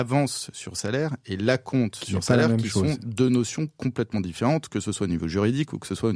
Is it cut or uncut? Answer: uncut